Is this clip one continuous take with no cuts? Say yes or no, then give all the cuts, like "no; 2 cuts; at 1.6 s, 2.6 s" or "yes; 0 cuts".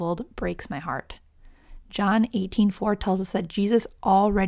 yes; 0 cuts